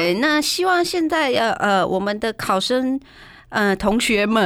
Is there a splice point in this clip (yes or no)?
no